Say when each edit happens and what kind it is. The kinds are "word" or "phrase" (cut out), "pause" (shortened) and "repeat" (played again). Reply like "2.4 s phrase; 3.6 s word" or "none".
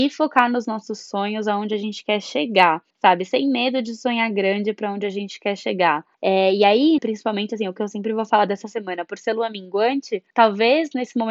2.9 s pause; 6.1 s pause; 7.0 s word; 10.3 s pause